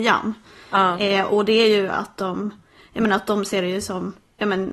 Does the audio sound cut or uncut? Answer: uncut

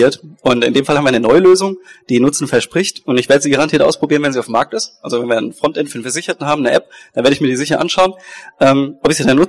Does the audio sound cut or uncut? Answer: uncut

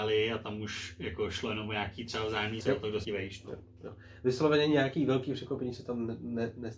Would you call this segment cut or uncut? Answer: cut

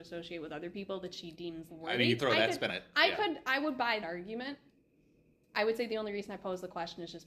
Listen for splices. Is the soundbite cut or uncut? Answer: cut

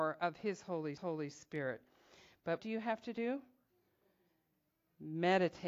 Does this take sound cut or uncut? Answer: cut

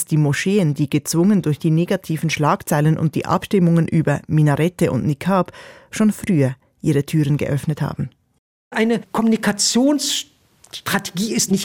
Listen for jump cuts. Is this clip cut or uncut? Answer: uncut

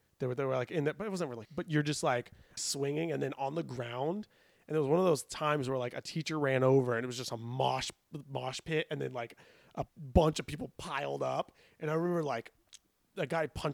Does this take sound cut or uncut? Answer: cut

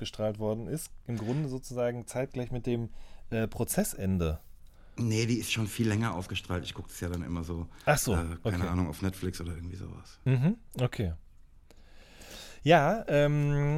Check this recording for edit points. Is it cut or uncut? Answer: uncut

